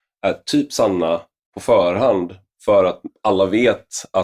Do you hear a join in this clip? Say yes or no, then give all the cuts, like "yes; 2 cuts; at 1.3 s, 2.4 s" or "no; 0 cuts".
no; 0 cuts